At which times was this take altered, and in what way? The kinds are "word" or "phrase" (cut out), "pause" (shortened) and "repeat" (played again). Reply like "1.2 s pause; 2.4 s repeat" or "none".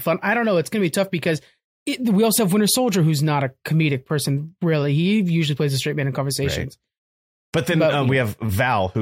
none